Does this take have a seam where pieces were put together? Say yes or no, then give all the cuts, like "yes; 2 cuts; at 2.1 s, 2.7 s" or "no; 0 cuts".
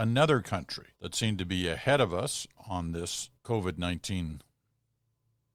yes; 2 cuts; at 0.9 s, 3.4 s